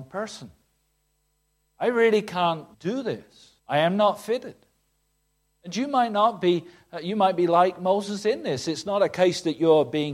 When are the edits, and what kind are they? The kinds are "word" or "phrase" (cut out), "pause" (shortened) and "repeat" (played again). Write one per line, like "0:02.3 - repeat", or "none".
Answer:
0:02.7 - pause
0:03.6 - pause